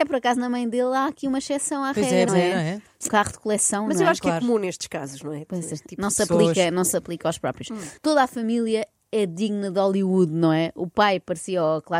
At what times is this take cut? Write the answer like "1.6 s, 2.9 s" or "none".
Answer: 2.3 s, 3.1 s, 8.0 s